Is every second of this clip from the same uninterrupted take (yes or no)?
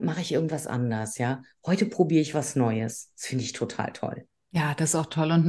yes